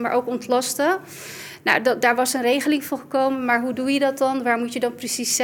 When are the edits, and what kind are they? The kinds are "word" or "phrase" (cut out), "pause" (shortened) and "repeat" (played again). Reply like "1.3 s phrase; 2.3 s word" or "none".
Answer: none